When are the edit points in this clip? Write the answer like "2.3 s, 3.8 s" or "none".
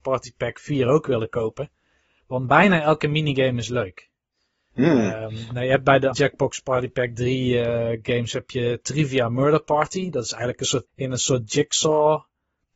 6.1 s, 10.9 s

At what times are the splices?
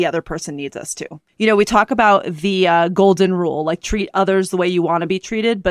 none

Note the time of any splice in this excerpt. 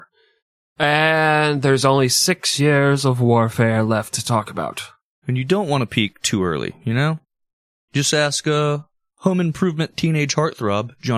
none

